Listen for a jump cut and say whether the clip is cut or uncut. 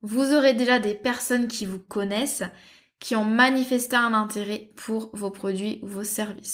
uncut